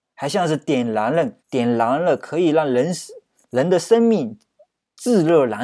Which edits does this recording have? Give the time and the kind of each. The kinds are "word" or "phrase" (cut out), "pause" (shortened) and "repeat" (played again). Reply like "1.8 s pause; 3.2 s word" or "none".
1.4 s pause; 3.4 s pause